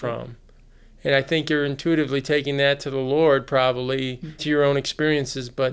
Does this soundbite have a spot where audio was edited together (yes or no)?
yes